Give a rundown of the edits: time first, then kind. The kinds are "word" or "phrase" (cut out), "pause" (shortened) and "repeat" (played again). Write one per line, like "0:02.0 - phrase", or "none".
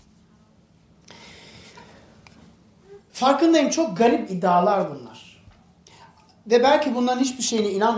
none

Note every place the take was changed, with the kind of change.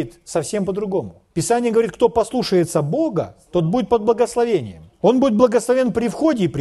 0:01.3 - pause
0:04.9 - pause

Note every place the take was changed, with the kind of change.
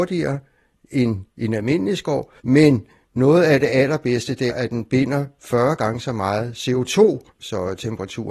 0:01.3 - pause
0:02.4 - pause
0:04.5 - word
0:07.3 - pause

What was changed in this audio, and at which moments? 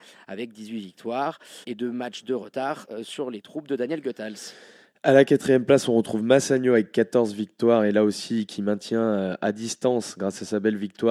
0:01.6 - word

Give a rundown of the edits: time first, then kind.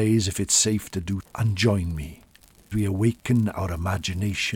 0:01.2 - word
0:02.7 - word

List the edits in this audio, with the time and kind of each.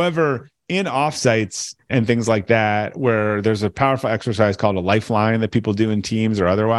none

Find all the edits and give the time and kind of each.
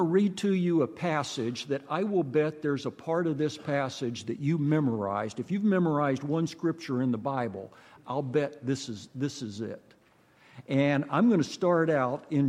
none

